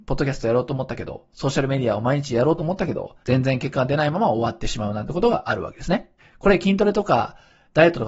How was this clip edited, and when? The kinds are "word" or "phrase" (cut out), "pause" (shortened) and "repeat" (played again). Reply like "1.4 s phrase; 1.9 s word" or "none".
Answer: 3.2 s pause; 6.2 s pause